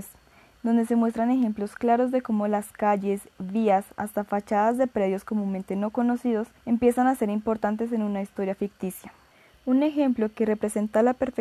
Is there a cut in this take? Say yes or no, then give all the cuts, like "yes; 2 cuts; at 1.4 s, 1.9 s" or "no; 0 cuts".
yes; 2 cuts; at 6.6 s, 9.3 s